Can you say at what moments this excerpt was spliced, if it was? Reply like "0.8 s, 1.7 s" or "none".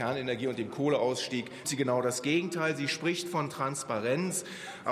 1.6 s